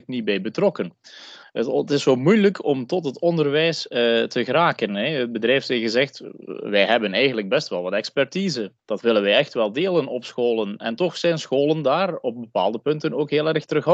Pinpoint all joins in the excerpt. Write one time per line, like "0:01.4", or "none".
0:08.8